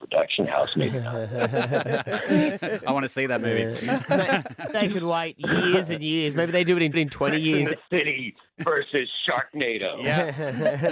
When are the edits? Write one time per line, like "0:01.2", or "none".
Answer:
0:04.7
0:06.9